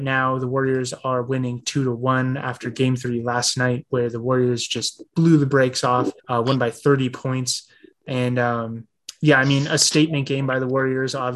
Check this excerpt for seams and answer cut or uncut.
cut